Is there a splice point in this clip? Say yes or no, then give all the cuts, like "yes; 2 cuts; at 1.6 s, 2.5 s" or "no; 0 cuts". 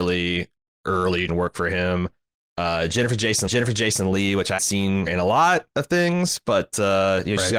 yes; 4 cuts; at 1.3 s, 3.5 s, 4.6 s, 5.1 s